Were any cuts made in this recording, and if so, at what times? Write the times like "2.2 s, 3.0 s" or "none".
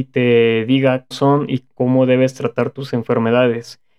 1.1 s